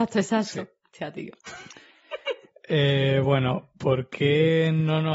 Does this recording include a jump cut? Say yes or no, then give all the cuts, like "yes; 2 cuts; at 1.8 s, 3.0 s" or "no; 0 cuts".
no; 0 cuts